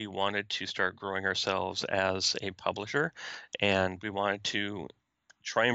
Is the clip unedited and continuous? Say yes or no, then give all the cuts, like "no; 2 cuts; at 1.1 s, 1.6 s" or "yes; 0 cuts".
yes; 0 cuts